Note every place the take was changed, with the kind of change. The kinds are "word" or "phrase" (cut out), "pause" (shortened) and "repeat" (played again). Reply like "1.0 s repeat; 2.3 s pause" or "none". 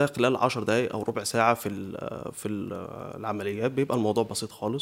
none